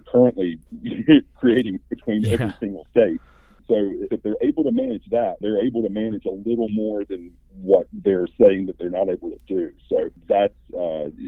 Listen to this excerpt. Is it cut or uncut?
cut